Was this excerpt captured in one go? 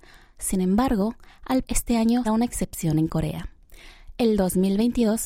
no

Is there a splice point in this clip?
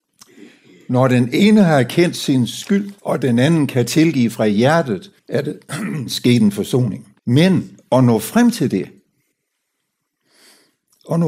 yes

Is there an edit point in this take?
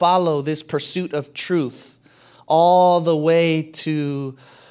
no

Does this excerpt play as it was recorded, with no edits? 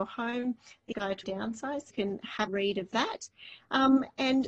no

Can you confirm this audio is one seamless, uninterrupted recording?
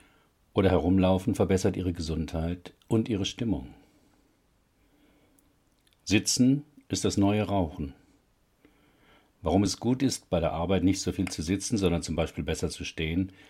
yes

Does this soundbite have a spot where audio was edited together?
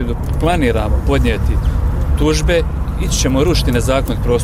no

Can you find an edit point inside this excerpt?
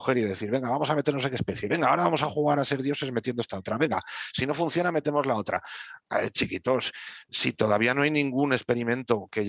no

